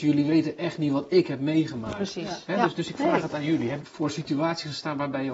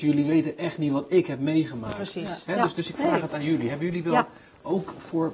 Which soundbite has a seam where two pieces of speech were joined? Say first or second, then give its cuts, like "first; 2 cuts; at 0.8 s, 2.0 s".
first; 1 cut; at 3.8 s